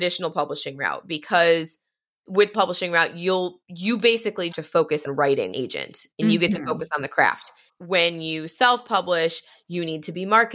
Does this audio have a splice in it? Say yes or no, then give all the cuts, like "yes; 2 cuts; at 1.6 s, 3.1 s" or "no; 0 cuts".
yes; 6 cuts; at 2.5 s, 4.5 s, 5.1 s, 5.5 s, 6.1 s, 7.7 s